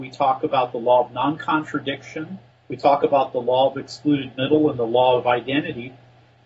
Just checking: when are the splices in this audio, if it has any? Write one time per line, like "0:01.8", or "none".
0:02.5